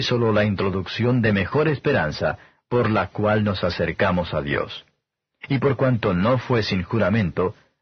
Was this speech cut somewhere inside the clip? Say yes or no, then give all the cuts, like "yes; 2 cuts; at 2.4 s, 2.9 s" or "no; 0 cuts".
no; 0 cuts